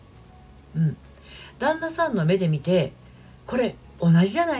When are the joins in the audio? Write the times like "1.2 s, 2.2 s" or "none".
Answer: none